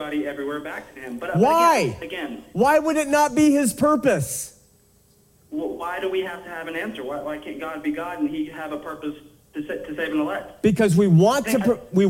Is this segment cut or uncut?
uncut